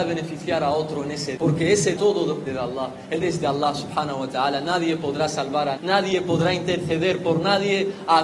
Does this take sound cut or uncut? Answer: cut